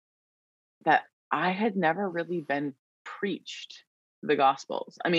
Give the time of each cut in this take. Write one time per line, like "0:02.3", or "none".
none